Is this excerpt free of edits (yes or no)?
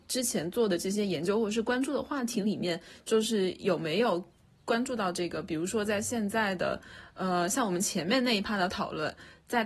yes